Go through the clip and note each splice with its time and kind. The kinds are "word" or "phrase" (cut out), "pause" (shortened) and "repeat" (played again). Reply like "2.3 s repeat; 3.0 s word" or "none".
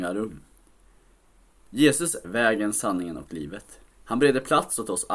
2.2 s word; 3.9 s pause